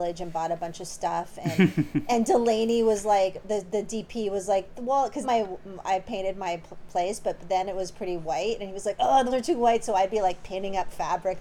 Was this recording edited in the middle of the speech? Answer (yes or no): yes